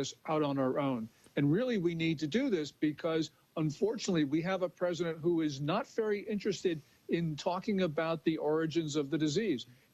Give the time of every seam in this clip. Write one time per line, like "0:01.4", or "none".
none